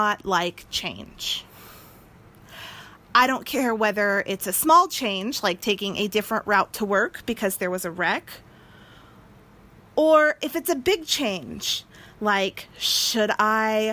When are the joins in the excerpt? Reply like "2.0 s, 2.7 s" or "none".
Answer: none